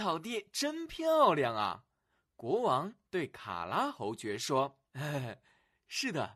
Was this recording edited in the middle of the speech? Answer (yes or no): yes